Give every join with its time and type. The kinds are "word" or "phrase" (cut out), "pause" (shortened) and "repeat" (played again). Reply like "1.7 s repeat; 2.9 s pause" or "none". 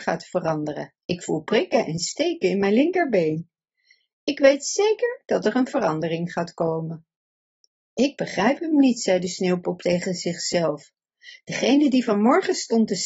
1.0 s pause